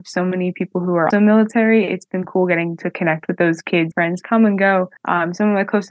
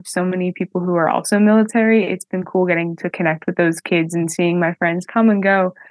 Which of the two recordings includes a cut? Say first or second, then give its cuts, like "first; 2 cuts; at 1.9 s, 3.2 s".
first; 3 cuts; at 1.1 s, 3.9 s, 5.0 s